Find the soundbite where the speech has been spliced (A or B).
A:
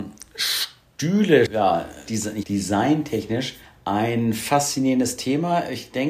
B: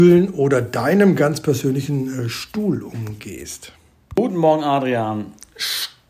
A